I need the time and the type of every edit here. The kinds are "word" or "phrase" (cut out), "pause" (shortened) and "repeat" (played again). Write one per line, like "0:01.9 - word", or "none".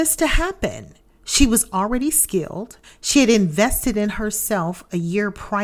0:02.8 - pause

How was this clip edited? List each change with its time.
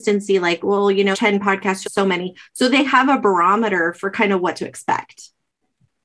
0:01.1 - phrase
0:01.8 - phrase

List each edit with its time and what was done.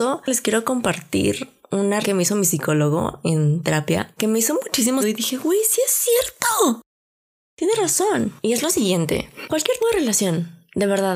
0:02.0 - word
0:05.0 - word
0:09.5 - word
0:09.8 - word

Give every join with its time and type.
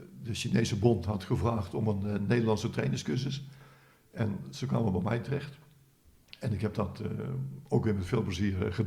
none

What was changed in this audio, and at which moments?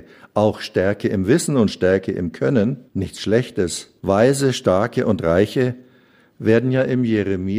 0:02.9 - pause
0:04.0 - pause

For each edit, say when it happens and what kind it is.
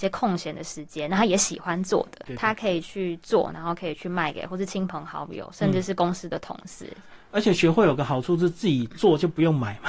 0:02.3 - word

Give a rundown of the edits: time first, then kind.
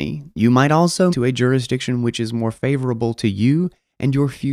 0:01.1 - word

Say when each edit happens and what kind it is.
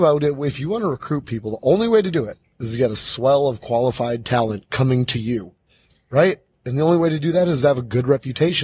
none

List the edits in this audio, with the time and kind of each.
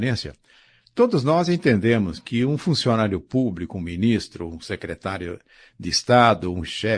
none

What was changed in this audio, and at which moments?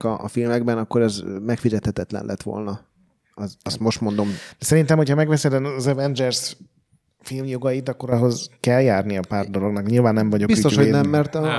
none

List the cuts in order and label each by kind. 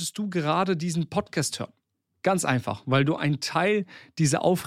0:01.9 - pause

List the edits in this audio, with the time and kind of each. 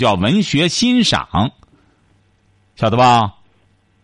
none

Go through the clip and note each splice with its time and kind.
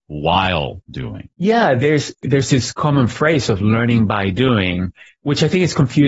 0:01.3 - pause

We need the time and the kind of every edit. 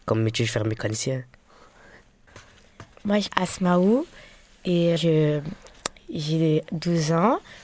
0:03.3 - word
0:05.0 - word

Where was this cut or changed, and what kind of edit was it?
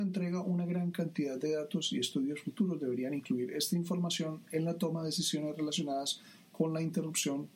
none

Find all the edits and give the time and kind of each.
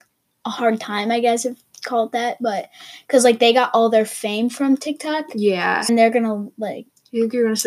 0:05.9 - word

